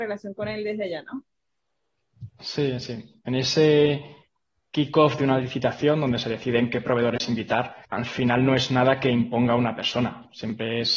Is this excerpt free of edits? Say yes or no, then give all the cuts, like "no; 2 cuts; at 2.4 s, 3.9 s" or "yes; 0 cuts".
no; 1 cut; at 7.8 s